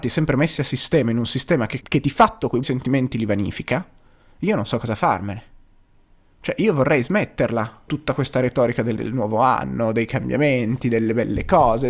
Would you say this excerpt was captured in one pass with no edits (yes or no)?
no